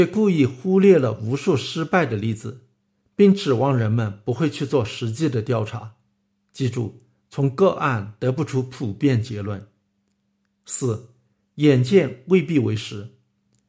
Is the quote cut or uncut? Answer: uncut